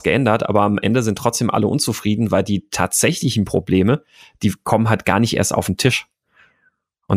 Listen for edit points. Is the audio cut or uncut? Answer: uncut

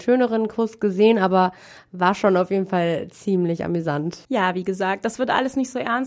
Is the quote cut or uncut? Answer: cut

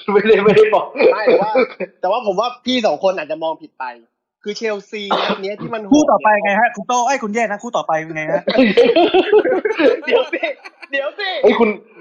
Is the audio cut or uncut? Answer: uncut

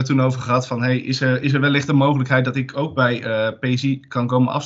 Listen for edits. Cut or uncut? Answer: uncut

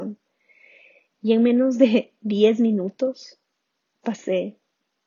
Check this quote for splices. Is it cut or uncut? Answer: uncut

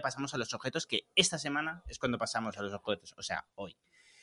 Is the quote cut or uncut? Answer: uncut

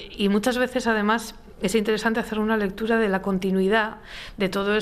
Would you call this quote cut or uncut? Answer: uncut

